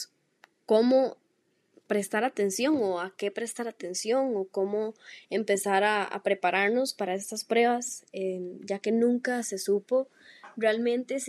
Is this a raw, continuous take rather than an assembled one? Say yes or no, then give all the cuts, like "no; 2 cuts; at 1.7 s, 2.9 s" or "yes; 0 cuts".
yes; 0 cuts